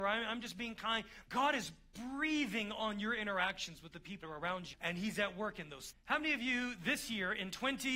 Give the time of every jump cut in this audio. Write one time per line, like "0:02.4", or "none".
0:01.3
0:04.2
0:04.7
0:05.9